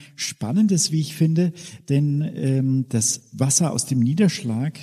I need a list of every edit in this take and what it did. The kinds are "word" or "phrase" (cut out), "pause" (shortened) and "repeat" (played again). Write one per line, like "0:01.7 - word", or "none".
none

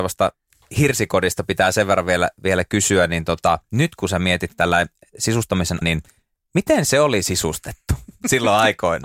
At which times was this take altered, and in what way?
0:05.8 - word

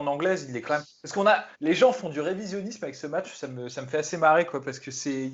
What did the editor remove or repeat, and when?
0:01.5 - pause

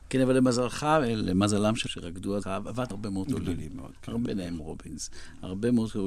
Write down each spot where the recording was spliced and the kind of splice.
0:01.9 - word
0:02.4 - word
0:02.9 - word
0:03.3 - word
0:04.3 - word
0:04.6 - word

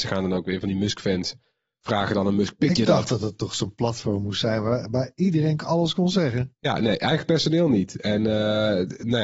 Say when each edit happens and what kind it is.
none

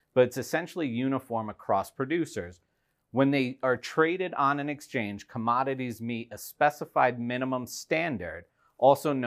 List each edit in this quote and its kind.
none

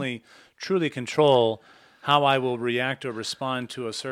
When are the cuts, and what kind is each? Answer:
none

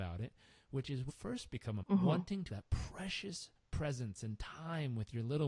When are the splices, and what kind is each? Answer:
0:01.1 - word
0:01.8 - word
0:02.5 - word

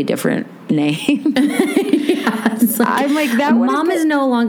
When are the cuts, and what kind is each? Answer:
none

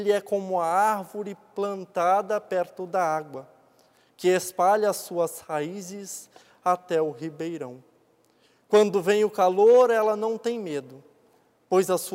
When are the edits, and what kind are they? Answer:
none

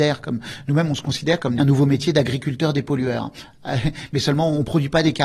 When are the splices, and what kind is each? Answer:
0:01.6 - phrase

